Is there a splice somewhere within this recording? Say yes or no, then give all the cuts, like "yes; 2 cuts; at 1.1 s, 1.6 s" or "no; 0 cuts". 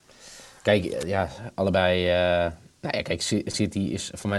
no; 0 cuts